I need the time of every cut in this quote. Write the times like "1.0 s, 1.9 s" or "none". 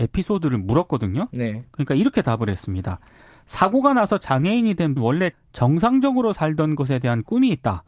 5.0 s, 5.3 s